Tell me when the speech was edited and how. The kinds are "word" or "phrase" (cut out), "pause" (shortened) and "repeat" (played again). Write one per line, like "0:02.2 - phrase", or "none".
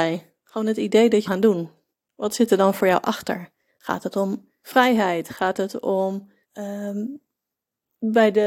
0:01.3 - phrase
0:01.9 - pause
0:03.7 - pause
0:04.6 - pause
0:06.4 - pause